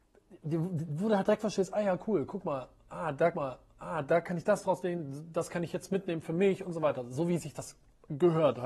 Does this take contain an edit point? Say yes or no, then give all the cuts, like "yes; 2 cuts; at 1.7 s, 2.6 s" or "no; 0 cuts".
yes; 1 cut; at 3.3 s